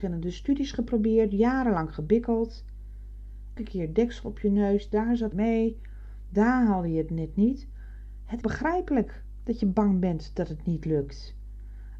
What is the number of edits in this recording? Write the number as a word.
three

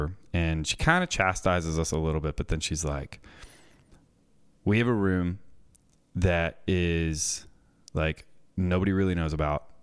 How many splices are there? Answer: zero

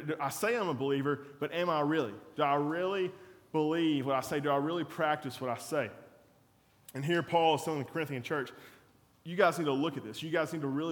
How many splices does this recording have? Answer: zero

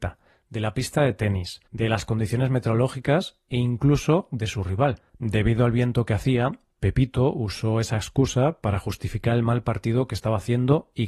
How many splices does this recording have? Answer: two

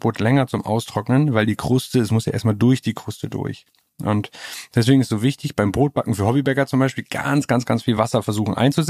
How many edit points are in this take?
zero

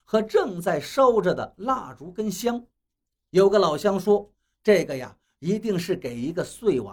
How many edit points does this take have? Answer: zero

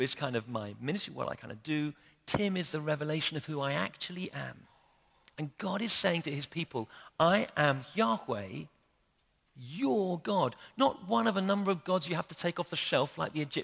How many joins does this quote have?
zero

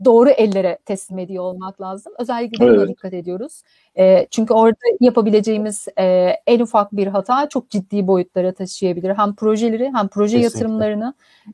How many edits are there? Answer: zero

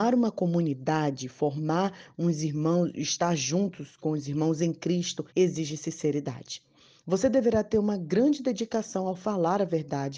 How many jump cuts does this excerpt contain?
one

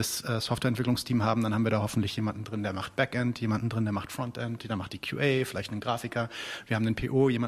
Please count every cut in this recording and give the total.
zero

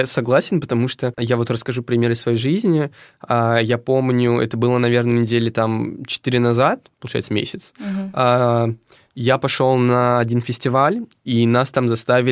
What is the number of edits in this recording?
one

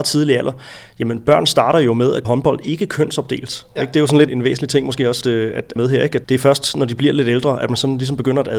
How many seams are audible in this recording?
five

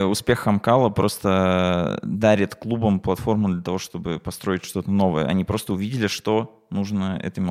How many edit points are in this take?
zero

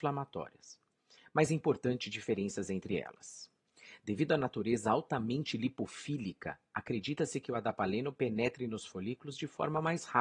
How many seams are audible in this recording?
zero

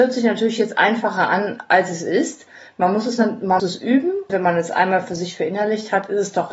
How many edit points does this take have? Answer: two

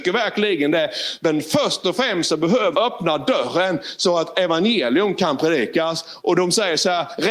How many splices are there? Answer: one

